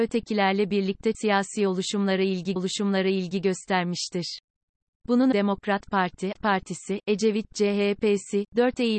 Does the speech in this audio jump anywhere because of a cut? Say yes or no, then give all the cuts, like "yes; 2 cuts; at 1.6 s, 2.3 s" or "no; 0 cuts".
yes; 4 cuts; at 1.1 s, 2.6 s, 5.3 s, 6.3 s